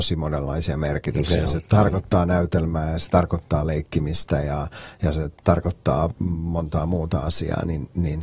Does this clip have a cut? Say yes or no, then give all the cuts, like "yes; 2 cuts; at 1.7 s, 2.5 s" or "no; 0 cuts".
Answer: no; 0 cuts